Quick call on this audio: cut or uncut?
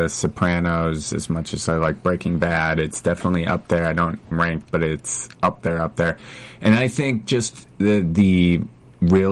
cut